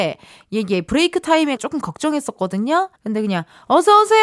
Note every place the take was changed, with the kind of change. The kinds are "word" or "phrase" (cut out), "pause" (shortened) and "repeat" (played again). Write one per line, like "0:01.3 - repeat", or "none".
0:01.6 - word
0:03.0 - pause